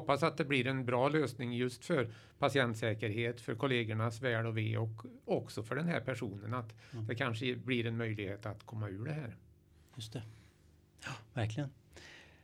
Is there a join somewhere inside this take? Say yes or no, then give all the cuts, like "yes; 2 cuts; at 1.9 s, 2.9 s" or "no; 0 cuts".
no; 0 cuts